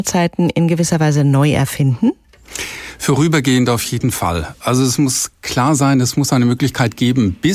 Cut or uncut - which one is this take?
uncut